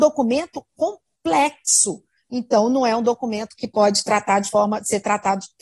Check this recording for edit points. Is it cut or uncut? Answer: uncut